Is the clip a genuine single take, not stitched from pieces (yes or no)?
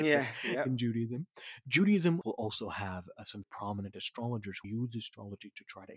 no